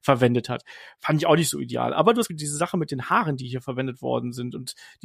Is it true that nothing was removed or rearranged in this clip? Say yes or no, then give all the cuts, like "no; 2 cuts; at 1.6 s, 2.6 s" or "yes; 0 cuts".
no; 1 cut; at 2.3 s